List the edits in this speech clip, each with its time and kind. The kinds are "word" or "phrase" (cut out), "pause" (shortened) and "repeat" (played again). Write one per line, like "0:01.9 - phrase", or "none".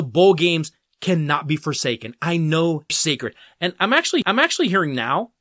0:02.9 - phrase
0:04.2 - repeat